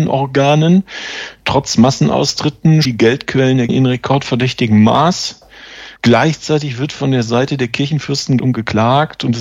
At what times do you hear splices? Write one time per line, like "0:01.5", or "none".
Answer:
0:02.8
0:03.7
0:06.0
0:08.4